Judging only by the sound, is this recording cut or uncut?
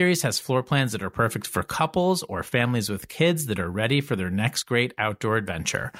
uncut